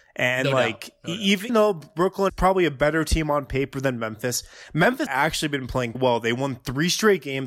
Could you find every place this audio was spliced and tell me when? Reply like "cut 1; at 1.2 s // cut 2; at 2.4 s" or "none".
cut 1; at 1.5 s // cut 2; at 2.3 s // cut 3; at 5.1 s // cut 4; at 5.9 s